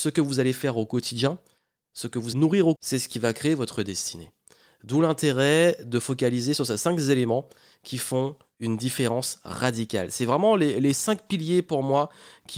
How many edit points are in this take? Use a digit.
2